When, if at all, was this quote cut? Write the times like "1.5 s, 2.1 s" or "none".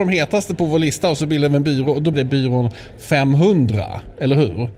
2.1 s